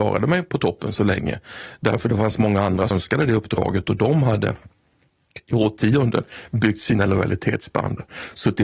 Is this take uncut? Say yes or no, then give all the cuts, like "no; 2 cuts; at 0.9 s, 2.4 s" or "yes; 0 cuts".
no; 1 cut; at 2.9 s